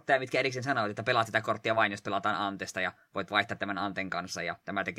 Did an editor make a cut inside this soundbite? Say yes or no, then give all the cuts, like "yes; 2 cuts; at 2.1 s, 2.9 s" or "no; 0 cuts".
no; 0 cuts